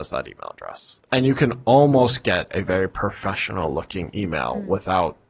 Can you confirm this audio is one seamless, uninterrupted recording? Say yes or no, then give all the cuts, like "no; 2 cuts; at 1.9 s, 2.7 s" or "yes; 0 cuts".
no; 1 cut; at 1.0 s